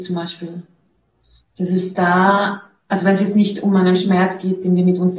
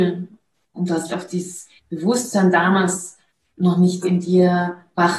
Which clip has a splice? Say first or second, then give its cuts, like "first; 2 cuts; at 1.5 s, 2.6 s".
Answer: second; 3 cuts; at 1.1 s, 1.8 s, 4.0 s